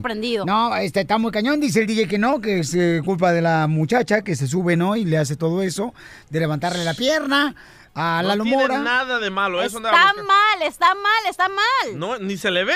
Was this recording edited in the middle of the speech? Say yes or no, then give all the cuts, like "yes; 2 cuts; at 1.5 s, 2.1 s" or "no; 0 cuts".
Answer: no; 0 cuts